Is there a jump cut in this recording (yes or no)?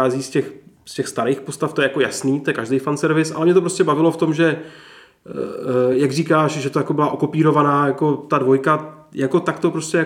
no